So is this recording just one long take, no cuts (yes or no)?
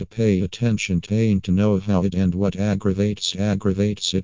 no